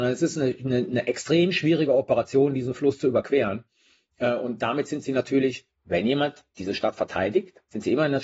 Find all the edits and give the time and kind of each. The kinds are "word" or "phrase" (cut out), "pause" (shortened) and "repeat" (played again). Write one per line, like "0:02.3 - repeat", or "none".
none